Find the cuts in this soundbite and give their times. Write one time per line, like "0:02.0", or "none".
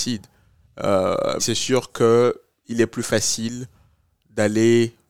0:01.4